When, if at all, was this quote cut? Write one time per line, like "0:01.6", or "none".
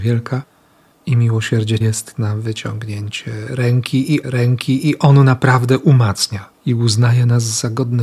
0:01.8
0:04.2
0:06.6